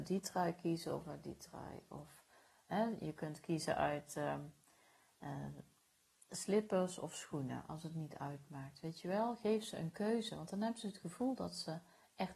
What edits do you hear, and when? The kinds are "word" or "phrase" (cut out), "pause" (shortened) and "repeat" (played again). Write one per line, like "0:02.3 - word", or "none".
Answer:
none